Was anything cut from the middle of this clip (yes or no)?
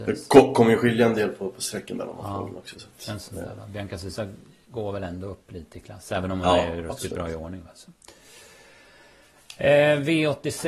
no